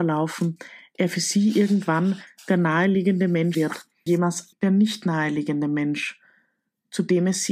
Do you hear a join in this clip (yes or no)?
yes